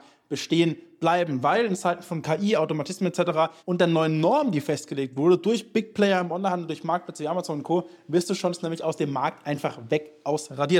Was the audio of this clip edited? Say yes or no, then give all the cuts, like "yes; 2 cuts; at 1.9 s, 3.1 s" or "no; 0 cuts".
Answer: yes; 1 cut; at 3.6 s